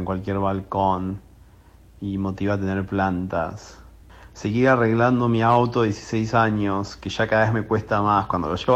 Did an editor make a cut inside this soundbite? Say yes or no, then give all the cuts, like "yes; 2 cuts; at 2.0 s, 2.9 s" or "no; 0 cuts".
no; 0 cuts